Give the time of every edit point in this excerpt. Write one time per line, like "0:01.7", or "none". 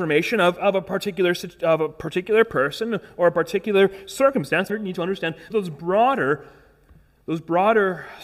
0:04.7
0:05.5